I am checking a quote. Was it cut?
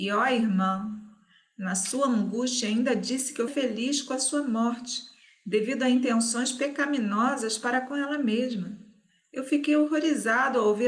yes; 1 cut; at 3.5 s

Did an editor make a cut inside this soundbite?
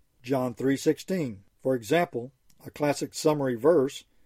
no; 0 cuts

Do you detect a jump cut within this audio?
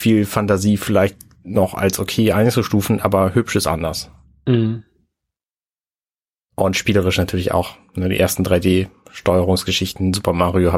no; 0 cuts

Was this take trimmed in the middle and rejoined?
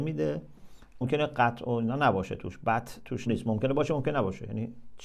yes; 2 cuts; at 1.0 s, 3.3 s

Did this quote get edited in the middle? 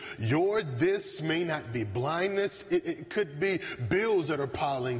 no; 0 cuts

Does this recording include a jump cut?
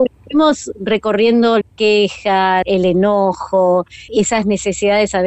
yes; 3 cuts; at 1.6 s, 2.6 s, 4.1 s

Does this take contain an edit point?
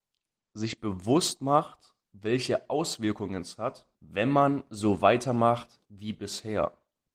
yes; 3 cuts; at 2.0 s, 3.9 s, 5.8 s

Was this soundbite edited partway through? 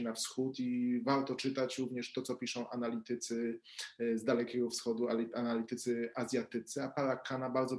no; 0 cuts

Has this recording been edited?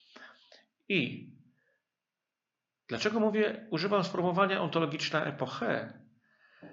no; 0 cuts

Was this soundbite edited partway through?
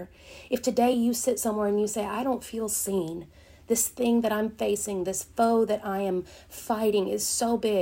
no; 0 cuts

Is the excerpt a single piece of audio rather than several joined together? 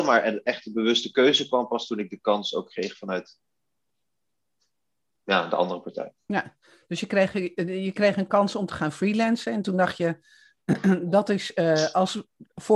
yes; 0 cuts

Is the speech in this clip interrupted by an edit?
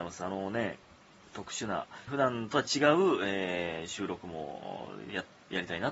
yes; 1 cut; at 2.1 s

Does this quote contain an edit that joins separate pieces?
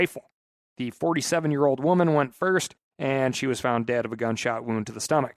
no; 0 cuts

